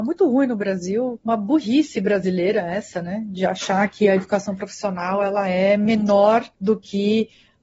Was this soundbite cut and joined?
yes; 1 cut; at 6.5 s

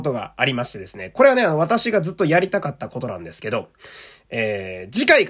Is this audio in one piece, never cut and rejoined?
yes; 0 cuts

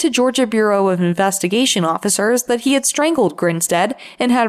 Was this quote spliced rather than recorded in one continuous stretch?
no; 0 cuts

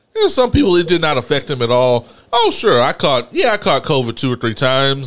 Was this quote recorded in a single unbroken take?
yes; 0 cuts

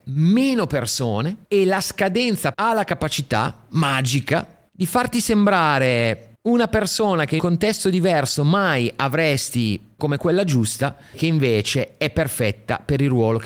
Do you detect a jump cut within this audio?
yes; 7 cuts; at 1.4 s, 2.5 s, 4.7 s, 6.3 s, 7.4 s, 10.0 s, 11.1 s

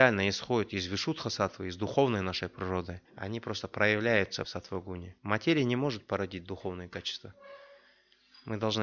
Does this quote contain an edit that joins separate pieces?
yes; 3 cuts; at 3.1 s, 4.4 s, 5.2 s

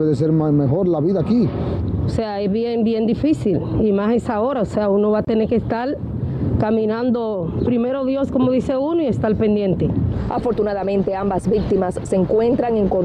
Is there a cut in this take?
no; 0 cuts

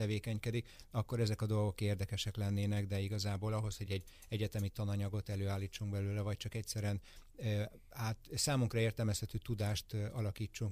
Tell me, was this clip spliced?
no; 0 cuts

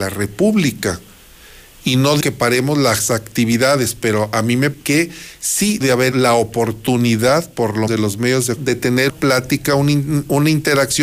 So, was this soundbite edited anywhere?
yes; 7 cuts; at 2.2 s, 4.7 s, 5.8 s, 6.1 s, 7.9 s, 8.6 s, 9.1 s

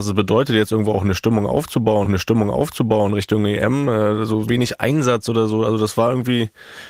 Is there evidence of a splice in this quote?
yes; 2 cuts; at 2.0 s, 4.5 s

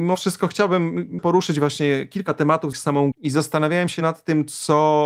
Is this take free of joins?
no; 3 cuts; at 1.2 s, 2.7 s, 3.1 s

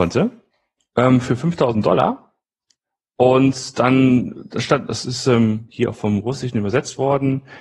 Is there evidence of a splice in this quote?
no; 0 cuts

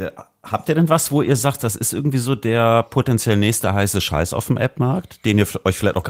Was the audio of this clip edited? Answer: no; 0 cuts

